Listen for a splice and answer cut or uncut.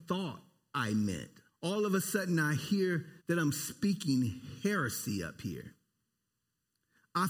cut